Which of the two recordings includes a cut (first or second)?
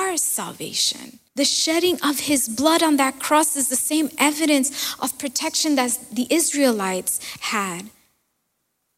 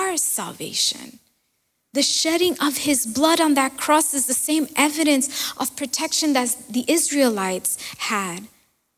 first